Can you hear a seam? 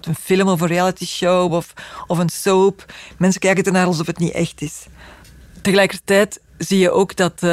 no; 0 cuts

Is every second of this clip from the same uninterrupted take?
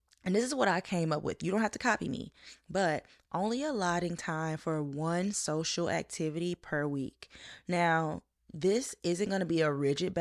yes; 0 cuts

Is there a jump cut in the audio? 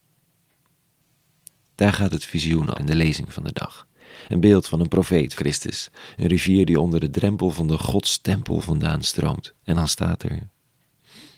yes; 3 cuts; at 2.7 s, 5.3 s, 9.6 s

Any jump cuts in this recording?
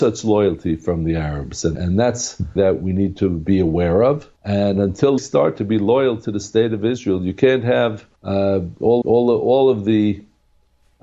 yes; 6 cuts; at 1.7 s, 2.6 s, 4.4 s, 5.2 s, 8.2 s, 9.0 s

